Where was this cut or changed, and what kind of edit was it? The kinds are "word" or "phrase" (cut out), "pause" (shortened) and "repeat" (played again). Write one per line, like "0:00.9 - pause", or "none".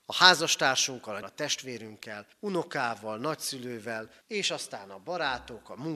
0:01.2 - word
0:02.3 - pause
0:04.2 - pause